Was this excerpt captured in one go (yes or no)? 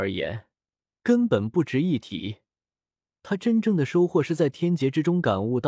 yes